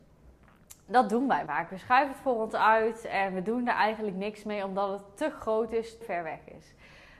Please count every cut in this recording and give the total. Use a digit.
2